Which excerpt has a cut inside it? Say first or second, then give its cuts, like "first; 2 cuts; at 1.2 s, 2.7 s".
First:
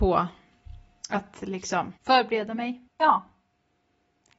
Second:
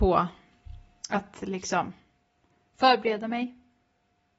first; 2 cuts; at 2.0 s, 2.9 s